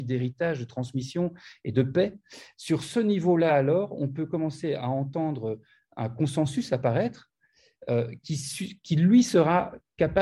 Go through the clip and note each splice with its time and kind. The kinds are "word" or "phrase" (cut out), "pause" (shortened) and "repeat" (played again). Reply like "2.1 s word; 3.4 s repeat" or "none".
none